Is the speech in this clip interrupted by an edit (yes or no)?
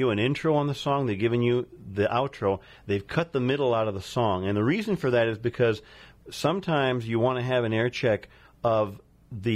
no